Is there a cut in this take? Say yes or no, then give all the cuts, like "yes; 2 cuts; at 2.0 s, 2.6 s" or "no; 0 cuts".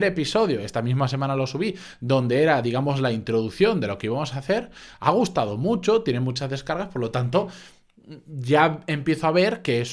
no; 0 cuts